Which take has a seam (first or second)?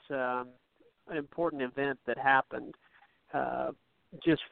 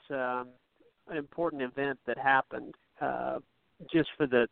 second